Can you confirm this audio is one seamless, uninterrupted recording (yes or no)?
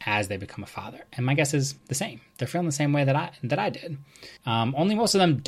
no